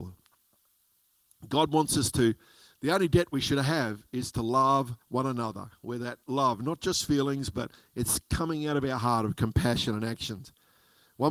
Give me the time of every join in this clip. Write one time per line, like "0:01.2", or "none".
0:05.0
0:06.2